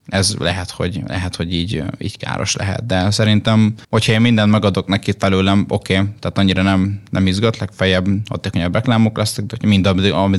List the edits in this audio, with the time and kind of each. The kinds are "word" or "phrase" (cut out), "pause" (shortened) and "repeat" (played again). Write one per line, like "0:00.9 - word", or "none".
0:03.8 - pause

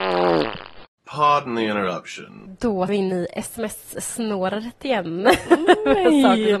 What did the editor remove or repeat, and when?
0:02.9 - word

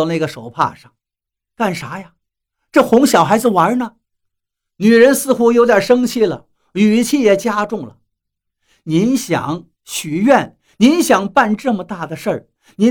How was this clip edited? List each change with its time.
0:01.3 - pause

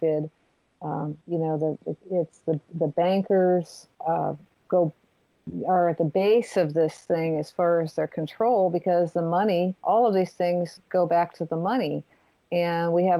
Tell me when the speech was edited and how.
0:01.2 - pause
0:02.0 - pause
0:03.9 - pause
0:09.8 - pause

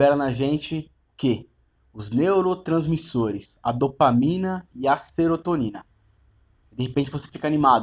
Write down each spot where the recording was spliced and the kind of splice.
0:01.0 - pause

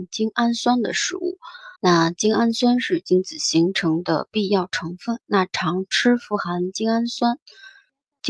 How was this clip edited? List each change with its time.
0:01.8 - pause

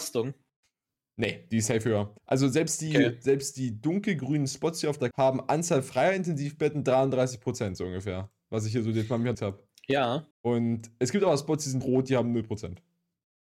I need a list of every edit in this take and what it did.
0:02.2 - pause
0:05.1 - word
0:09.3 - word
0:10.3 - pause
0:11.8 - word

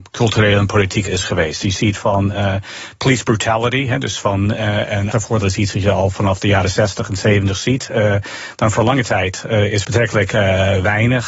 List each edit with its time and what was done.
0:01.1 - word
0:05.1 - word
0:09.8 - word

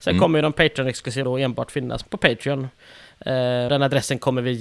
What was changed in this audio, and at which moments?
0:01.2 - word
0:02.0 - word
0:03.7 - word

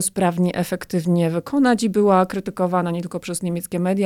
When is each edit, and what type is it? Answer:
none

